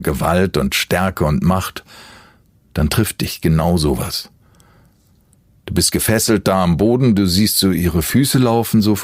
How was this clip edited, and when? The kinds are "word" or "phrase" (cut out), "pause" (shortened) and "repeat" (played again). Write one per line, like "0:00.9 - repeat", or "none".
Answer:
none